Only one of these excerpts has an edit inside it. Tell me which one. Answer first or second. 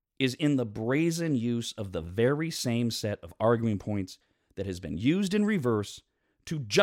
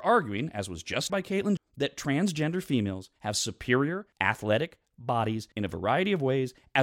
second